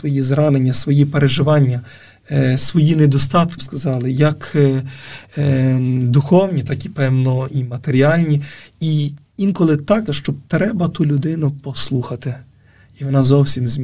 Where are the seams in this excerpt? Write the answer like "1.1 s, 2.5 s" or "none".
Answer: 3.6 s, 10.1 s, 10.5 s